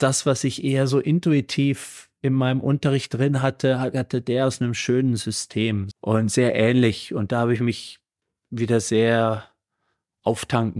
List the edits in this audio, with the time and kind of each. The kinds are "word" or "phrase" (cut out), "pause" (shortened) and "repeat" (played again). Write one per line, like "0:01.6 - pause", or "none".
0:05.9 - word